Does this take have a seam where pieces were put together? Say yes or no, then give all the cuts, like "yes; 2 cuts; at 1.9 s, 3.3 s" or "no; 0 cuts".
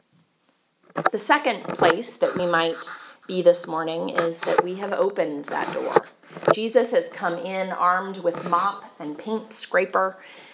no; 0 cuts